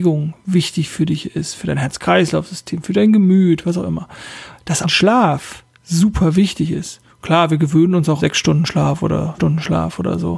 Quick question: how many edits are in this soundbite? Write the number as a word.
four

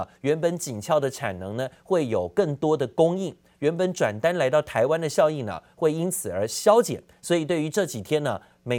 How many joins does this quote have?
one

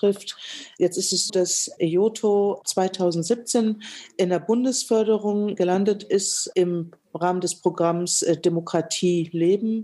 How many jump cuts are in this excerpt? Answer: two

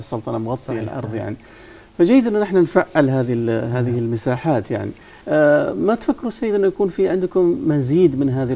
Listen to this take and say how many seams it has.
one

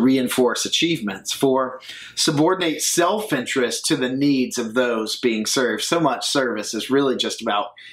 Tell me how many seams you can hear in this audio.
zero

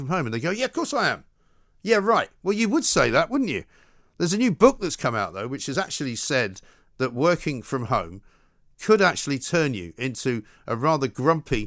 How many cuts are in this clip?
zero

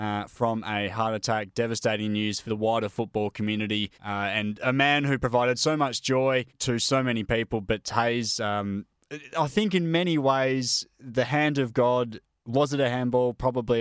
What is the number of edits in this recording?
three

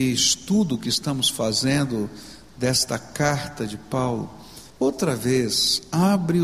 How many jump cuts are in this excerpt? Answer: one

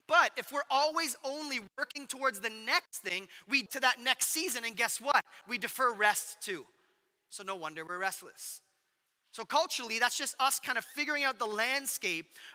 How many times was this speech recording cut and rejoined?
one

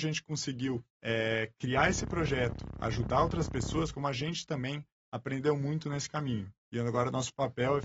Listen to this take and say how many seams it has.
one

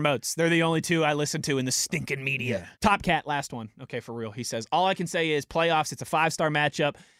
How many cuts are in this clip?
one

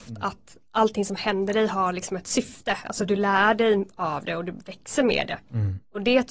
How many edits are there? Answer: zero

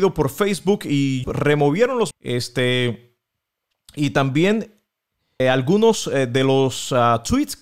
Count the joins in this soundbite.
three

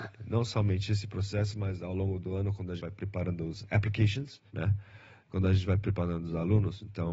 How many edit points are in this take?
two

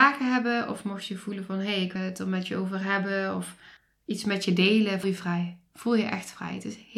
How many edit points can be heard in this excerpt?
three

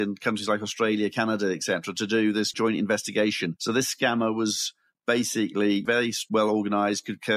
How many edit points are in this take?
zero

